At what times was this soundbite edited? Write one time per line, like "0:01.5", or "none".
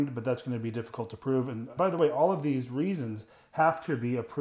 0:01.8